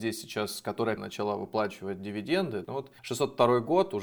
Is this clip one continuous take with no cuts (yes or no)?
no